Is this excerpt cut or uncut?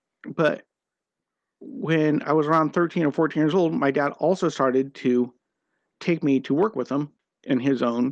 uncut